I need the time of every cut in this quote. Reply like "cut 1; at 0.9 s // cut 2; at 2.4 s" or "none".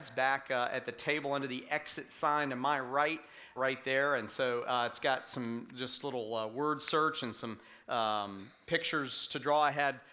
cut 1; at 3.6 s